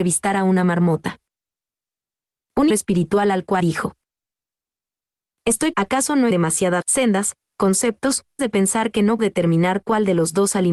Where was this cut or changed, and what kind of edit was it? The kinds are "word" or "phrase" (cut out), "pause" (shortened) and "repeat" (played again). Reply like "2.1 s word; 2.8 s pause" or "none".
2.7 s word; 3.6 s word; 5.7 s word; 6.3 s word; 6.8 s word; 8.4 s word; 9.2 s word